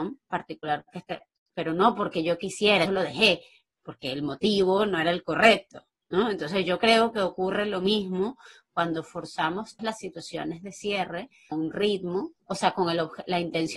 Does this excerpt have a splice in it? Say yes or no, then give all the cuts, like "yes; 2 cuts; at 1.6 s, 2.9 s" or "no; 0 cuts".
yes; 3 cuts; at 2.9 s, 9.8 s, 11.5 s